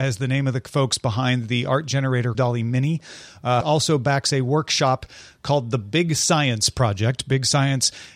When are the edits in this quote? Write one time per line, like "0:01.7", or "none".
0:02.3
0:03.6